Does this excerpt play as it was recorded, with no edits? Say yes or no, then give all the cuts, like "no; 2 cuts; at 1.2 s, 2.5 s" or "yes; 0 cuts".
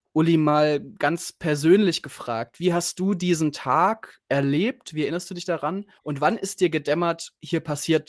no; 2 cuts; at 4.2 s, 6.0 s